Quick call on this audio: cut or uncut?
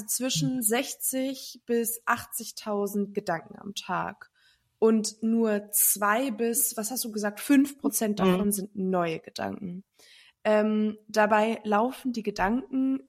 uncut